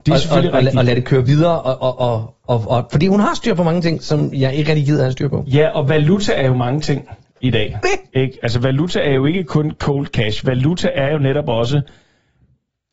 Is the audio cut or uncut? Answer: cut